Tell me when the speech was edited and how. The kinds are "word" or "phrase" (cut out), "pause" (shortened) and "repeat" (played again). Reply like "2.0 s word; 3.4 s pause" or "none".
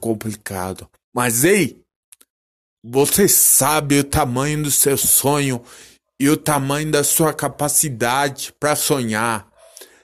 none